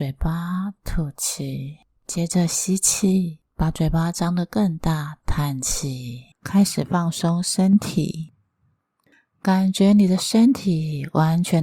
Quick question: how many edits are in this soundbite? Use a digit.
3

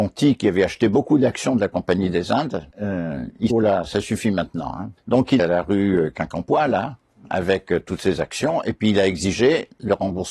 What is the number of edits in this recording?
4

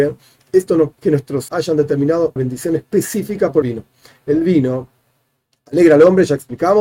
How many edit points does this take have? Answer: 4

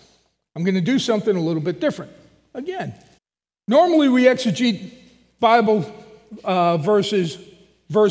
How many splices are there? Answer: 1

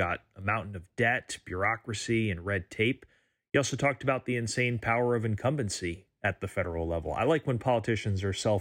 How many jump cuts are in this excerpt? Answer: 0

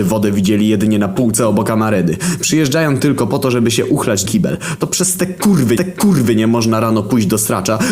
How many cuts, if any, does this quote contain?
2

